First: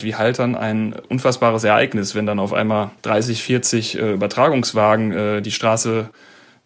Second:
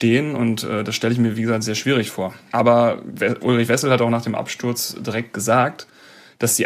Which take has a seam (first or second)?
first